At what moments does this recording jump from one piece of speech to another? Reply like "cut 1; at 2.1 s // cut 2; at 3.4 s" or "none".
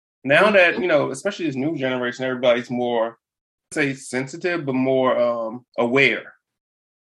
cut 1; at 3.7 s // cut 2; at 5.7 s